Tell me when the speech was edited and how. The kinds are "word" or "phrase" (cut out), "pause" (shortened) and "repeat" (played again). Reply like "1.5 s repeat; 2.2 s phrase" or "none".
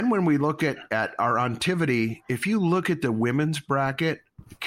none